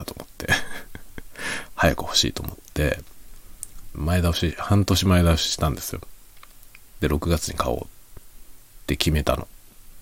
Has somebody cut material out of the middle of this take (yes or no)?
yes